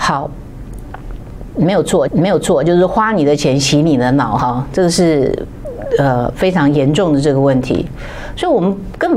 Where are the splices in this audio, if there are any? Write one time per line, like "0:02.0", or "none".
0:02.1